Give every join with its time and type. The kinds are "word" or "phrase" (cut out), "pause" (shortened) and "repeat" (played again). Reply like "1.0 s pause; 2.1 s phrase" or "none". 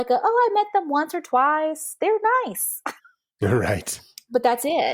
3.0 s pause